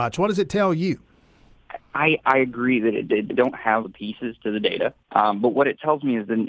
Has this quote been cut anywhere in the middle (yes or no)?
yes